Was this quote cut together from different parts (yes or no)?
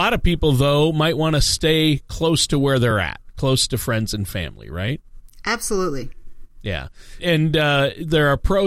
yes